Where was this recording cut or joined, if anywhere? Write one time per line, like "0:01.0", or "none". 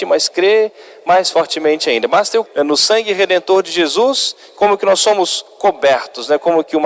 0:02.4
0:05.5